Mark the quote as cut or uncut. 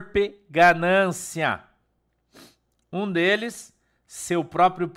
uncut